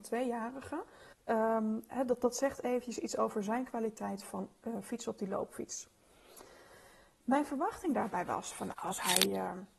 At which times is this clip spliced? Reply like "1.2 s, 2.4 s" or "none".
1.1 s, 8.7 s